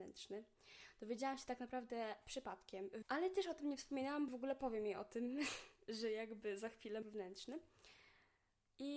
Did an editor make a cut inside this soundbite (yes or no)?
yes